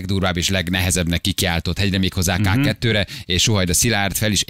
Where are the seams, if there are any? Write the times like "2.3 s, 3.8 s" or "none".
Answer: none

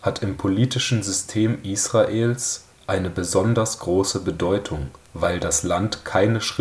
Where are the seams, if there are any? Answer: 5.0 s

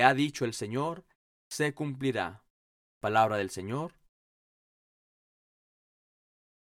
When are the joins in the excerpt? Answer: 2.8 s

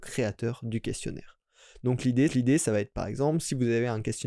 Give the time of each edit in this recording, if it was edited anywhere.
2.3 s

